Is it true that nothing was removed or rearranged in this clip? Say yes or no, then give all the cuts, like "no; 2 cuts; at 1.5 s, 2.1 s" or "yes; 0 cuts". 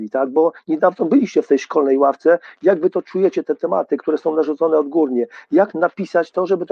yes; 0 cuts